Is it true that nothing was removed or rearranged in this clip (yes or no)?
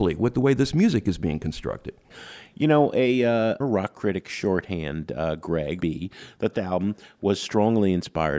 no